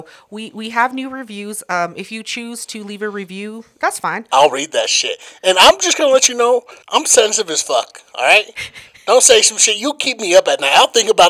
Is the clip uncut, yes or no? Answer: no